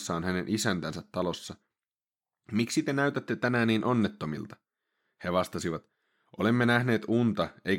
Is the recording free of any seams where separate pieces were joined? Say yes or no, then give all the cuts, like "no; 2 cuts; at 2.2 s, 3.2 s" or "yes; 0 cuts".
yes; 0 cuts